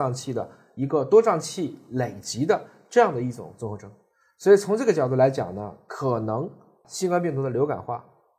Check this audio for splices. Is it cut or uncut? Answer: uncut